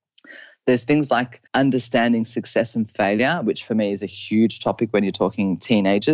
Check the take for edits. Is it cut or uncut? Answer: cut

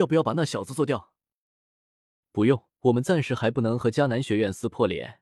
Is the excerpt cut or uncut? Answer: cut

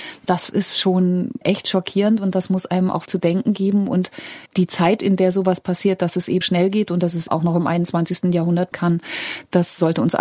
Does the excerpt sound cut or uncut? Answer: cut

